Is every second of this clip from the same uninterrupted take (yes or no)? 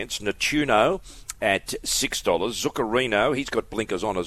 yes